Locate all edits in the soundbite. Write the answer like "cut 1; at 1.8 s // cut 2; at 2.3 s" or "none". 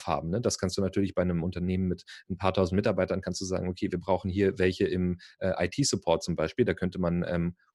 none

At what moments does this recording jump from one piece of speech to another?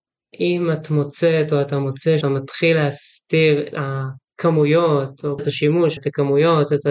cut 1; at 2.2 s // cut 2; at 3.7 s // cut 3; at 5.4 s // cut 4; at 6.0 s

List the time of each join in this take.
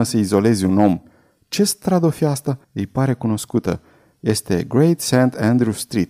cut 1; at 2.6 s

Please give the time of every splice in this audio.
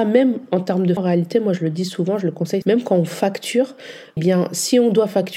cut 1; at 1.0 s // cut 2; at 2.6 s // cut 3; at 4.2 s

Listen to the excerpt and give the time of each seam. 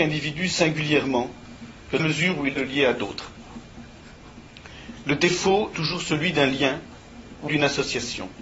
cut 1; at 2.0 s // cut 2; at 2.6 s // cut 3; at 5.7 s // cut 4; at 7.5 s

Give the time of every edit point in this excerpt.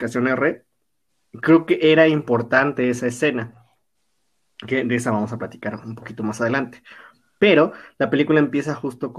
none

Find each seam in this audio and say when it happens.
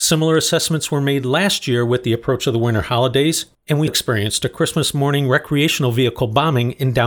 cut 1; at 3.9 s

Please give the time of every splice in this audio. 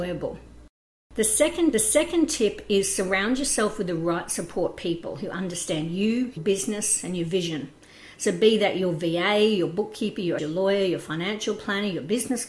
cut 1; at 1.7 s // cut 2; at 6.4 s // cut 3; at 10.4 s

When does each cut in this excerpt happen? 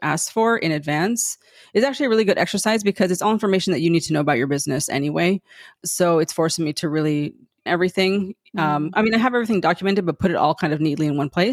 cut 1; at 7.7 s

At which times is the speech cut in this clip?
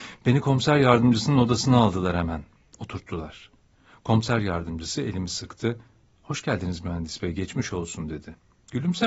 none

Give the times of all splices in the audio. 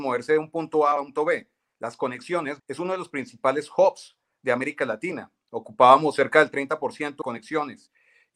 cut 1; at 1.2 s // cut 2; at 2.6 s // cut 3; at 7.2 s

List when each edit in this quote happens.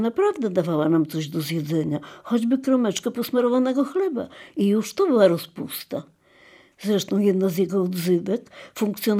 none

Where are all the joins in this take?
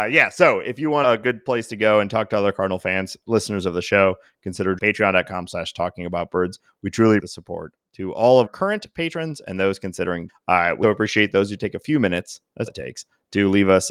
cut 1; at 1.0 s // cut 2; at 3.2 s // cut 3; at 4.8 s // cut 4; at 7.2 s // cut 5; at 8.5 s // cut 6; at 10.3 s // cut 7; at 10.8 s // cut 8; at 12.7 s

